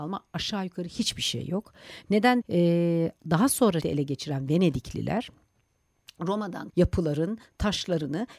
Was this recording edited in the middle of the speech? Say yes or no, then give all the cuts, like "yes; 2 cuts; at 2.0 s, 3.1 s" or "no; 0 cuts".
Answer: yes; 4 cuts; at 2.4 s, 3.2 s, 3.8 s, 6.7 s